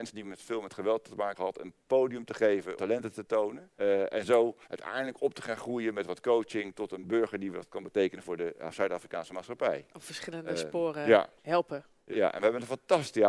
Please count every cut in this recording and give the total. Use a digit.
6